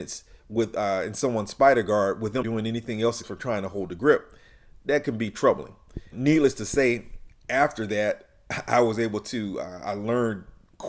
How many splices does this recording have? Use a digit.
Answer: 3